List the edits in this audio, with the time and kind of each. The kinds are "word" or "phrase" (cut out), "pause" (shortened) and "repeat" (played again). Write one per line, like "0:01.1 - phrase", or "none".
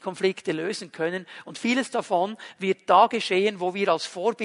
none